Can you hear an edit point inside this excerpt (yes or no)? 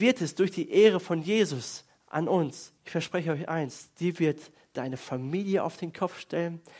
yes